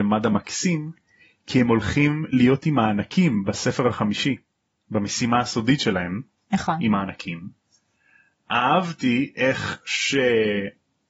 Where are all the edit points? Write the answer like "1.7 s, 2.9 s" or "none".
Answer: none

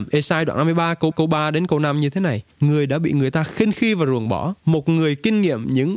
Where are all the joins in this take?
1.1 s, 2.5 s, 4.6 s

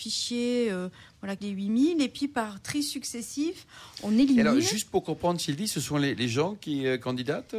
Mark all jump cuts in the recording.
1.4 s

